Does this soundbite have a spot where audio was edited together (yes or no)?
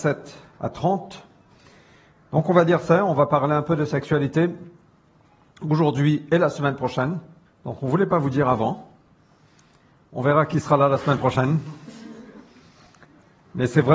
yes